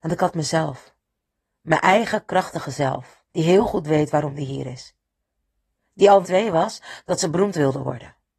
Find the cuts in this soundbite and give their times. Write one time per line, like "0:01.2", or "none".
0:03.3
0:06.2